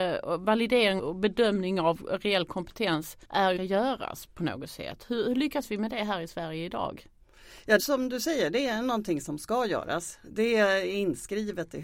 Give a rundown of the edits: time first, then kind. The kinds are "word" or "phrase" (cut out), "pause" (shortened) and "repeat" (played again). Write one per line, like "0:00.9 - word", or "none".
0:01.0 - word
0:03.2 - pause
0:03.6 - phrase
0:07.8 - phrase